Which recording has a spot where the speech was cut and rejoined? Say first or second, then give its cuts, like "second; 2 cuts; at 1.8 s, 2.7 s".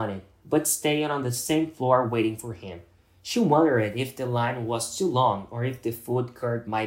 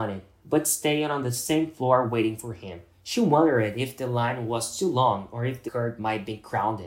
second; 2 cuts; at 2.9 s, 5.7 s